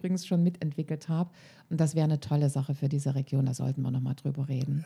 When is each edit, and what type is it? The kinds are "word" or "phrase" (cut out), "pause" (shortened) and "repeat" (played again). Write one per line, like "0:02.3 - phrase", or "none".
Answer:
none